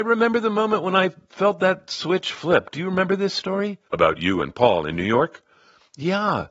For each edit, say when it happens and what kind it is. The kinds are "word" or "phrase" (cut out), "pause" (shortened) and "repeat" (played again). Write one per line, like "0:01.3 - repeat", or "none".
0:03.9 - pause